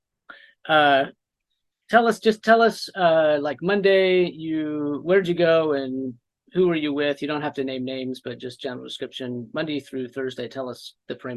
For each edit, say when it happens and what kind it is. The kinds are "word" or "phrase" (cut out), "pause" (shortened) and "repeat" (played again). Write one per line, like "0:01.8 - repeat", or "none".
none